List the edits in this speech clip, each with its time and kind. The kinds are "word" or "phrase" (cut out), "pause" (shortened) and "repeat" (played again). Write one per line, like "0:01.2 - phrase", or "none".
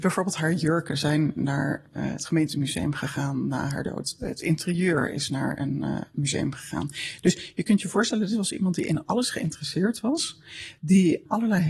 none